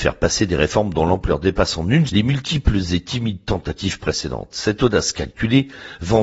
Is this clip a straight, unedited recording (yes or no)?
no